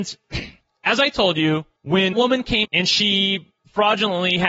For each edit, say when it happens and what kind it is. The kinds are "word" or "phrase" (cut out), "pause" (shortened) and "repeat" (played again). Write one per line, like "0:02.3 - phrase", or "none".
0:02.1 - word
0:02.6 - word